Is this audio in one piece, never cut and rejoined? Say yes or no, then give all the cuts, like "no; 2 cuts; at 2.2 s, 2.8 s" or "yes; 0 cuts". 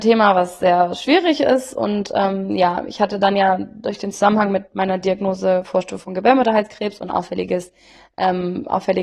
yes; 0 cuts